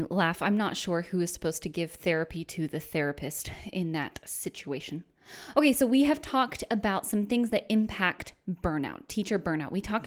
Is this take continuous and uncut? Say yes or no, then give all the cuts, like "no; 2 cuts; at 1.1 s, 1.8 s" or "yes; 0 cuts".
yes; 0 cuts